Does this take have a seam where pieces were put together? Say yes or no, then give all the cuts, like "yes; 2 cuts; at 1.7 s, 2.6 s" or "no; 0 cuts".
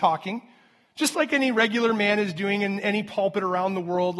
no; 0 cuts